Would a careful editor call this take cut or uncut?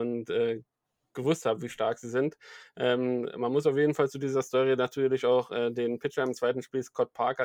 uncut